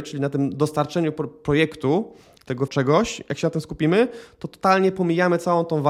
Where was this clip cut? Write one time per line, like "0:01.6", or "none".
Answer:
0:02.7